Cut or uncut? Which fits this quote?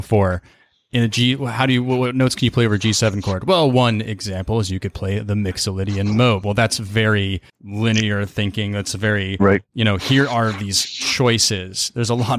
cut